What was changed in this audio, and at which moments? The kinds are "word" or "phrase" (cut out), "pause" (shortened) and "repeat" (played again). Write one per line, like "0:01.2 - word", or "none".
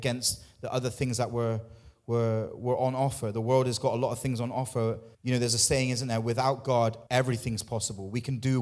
0:05.1 - pause
0:07.1 - pause